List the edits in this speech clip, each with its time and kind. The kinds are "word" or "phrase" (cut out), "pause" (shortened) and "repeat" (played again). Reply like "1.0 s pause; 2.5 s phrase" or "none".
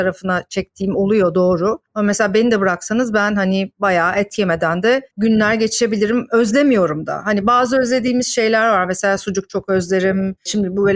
none